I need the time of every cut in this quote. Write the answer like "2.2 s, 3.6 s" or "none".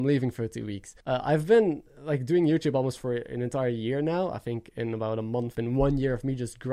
1.0 s, 5.5 s